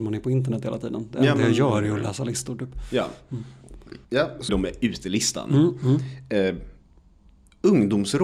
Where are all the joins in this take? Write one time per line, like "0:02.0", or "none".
0:04.0
0:04.5